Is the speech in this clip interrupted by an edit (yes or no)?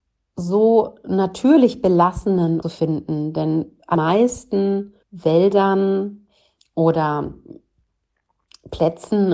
yes